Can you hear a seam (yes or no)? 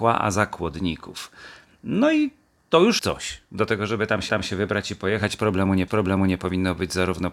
yes